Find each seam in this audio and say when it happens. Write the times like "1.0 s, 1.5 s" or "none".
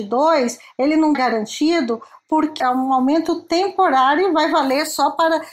1.1 s, 2.6 s